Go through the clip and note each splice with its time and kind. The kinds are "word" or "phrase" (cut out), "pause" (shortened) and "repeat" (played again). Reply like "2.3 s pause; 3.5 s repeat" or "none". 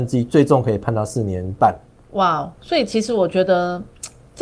1.9 s pause; 2.6 s word